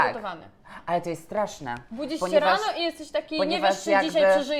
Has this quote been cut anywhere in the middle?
no; 0 cuts

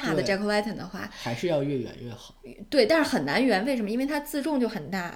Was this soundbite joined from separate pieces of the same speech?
no; 0 cuts

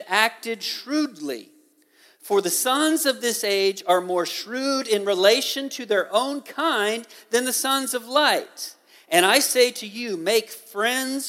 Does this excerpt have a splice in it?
no; 0 cuts

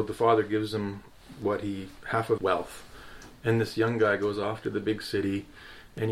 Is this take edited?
yes; 1 cut; at 2.4 s

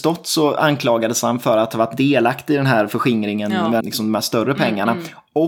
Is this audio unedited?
no; 1 cut; at 3.8 s

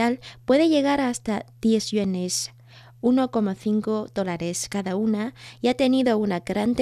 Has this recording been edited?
no; 0 cuts

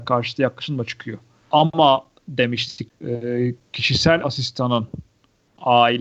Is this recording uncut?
no; 1 cut; at 2.9 s

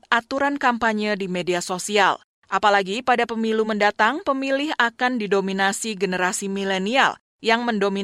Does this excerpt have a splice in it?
no; 0 cuts

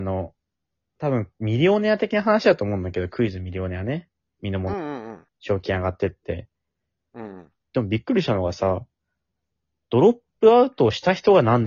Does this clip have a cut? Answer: yes; 1 cut; at 5.3 s

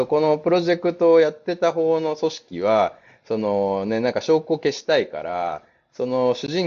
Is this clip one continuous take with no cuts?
yes; 0 cuts

